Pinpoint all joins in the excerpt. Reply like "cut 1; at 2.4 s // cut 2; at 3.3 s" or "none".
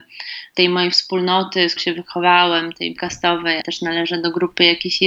cut 1; at 1.8 s // cut 2; at 3.0 s // cut 3; at 3.6 s